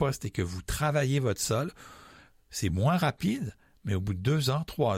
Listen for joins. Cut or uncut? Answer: uncut